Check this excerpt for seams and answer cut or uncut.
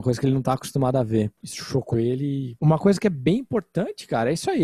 cut